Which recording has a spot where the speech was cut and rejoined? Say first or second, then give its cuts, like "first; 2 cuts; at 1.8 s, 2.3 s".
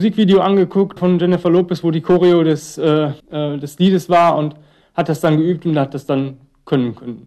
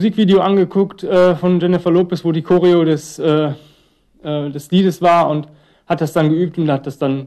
first; 2 cuts; at 1.0 s, 3.2 s